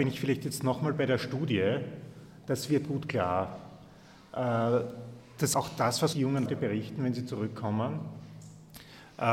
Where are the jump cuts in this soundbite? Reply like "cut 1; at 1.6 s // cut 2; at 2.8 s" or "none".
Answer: cut 1; at 2.8 s // cut 2; at 5.5 s // cut 3; at 6.1 s // cut 4; at 6.5 s